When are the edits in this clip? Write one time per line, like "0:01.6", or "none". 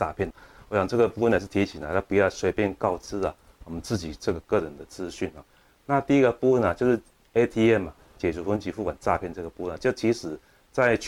none